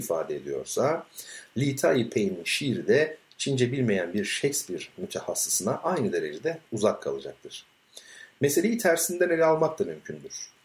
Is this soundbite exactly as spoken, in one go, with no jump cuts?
yes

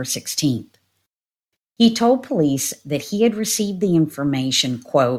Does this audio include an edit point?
no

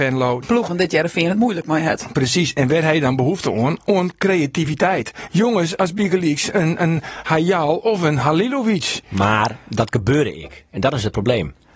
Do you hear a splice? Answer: no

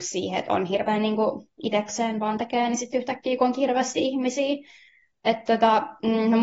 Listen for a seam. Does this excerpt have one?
no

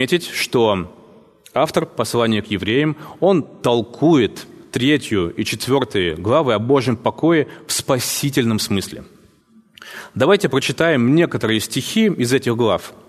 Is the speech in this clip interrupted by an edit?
no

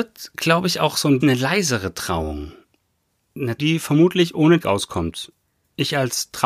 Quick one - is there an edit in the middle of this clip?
yes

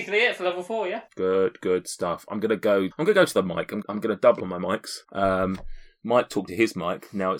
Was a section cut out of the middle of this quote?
yes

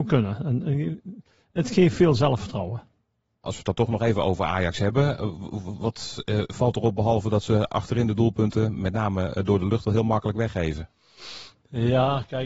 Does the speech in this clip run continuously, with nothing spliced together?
yes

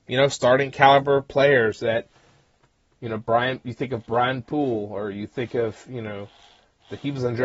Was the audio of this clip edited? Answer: no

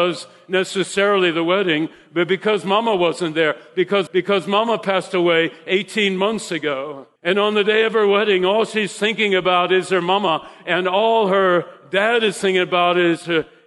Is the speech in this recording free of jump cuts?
no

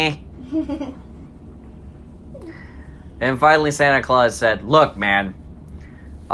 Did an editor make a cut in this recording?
no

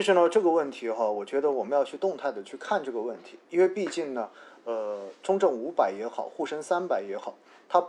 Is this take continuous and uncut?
yes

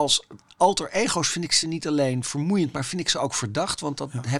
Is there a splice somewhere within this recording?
no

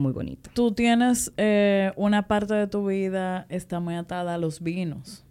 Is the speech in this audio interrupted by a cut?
no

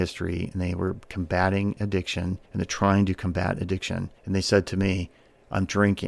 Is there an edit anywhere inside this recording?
yes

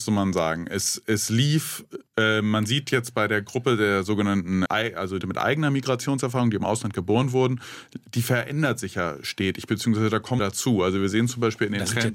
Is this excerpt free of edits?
no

